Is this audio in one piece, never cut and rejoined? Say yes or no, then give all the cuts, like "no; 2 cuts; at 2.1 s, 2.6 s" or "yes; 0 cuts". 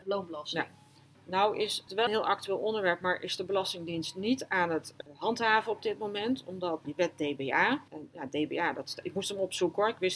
no; 3 cuts; at 2.1 s, 6.8 s, 7.9 s